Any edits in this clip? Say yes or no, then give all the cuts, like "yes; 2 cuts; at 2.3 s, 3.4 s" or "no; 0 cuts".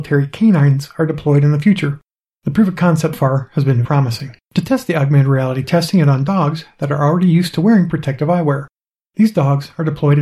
yes; 4 cuts; at 3.1 s, 3.8 s, 4.4 s, 5.6 s